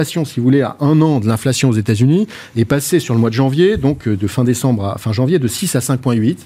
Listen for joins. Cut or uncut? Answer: uncut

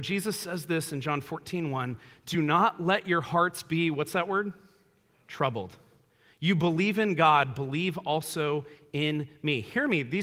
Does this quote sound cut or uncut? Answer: uncut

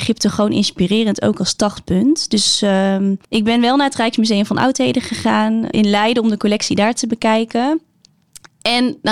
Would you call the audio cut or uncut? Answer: cut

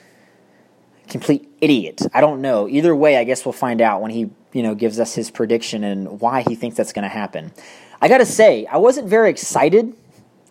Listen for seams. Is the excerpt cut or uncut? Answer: uncut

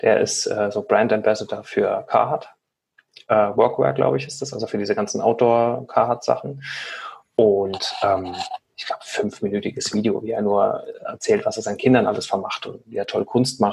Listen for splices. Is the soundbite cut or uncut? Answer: uncut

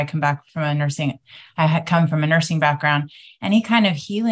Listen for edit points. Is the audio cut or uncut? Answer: uncut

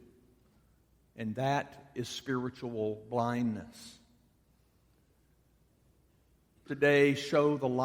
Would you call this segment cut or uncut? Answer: cut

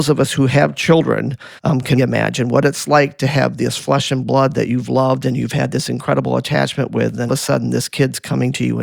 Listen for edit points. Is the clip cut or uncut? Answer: cut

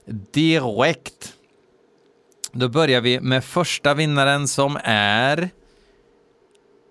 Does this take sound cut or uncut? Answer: uncut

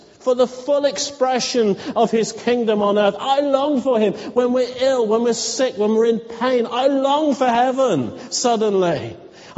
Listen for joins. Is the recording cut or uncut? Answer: uncut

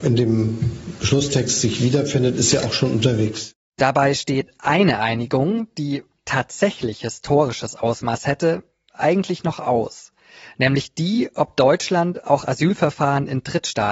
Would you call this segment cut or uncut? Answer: uncut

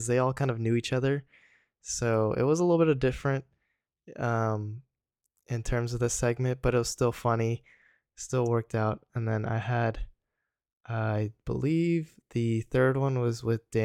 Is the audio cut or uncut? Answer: uncut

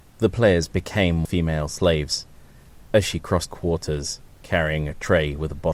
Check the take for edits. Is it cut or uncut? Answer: cut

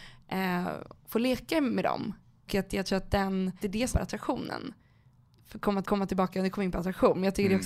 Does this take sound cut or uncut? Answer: cut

